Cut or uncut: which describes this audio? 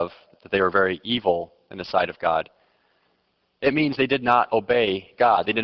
uncut